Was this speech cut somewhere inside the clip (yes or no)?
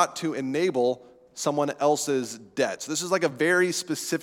no